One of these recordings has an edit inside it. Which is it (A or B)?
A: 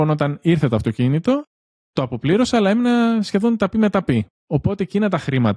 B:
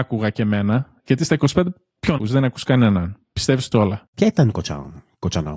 B